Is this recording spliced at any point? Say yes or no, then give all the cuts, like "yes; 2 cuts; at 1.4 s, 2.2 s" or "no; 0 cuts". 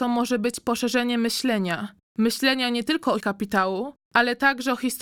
yes; 1 cut; at 3.2 s